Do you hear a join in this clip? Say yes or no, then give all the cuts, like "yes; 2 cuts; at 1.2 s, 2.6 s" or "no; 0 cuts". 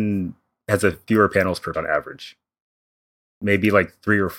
yes; 2 cuts; at 1.1 s, 1.7 s